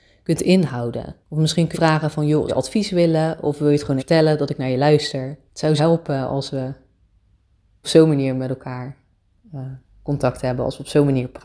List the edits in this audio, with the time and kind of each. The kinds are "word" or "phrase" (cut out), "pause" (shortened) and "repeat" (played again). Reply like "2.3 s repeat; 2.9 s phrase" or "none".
1.2 s pause; 1.7 s word; 2.5 s word; 4.0 s word; 5.5 s pause; 5.8 s word; 7.8 s word